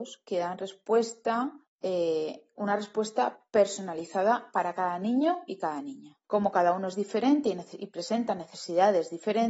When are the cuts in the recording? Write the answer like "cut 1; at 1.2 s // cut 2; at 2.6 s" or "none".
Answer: cut 1; at 1.7 s // cut 2; at 6.2 s

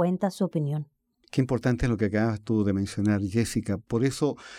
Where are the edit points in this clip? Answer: none

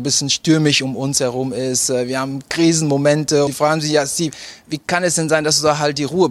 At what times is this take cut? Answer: cut 1; at 3.5 s

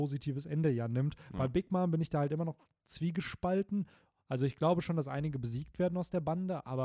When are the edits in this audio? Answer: none

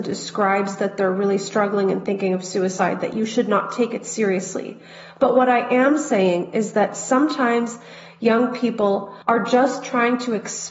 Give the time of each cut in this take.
cut 1; at 9.2 s

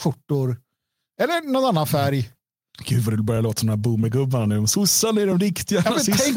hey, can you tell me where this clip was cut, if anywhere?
none

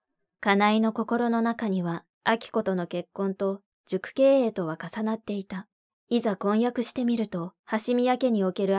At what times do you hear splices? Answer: cut 1; at 2.1 s // cut 2; at 5.9 s // cut 3; at 7.6 s

